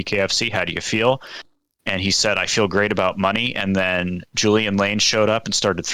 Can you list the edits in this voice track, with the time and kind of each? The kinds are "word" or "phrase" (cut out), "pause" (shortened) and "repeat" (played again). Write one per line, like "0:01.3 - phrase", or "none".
none